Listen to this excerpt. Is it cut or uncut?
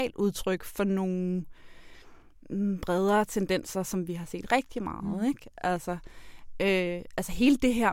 uncut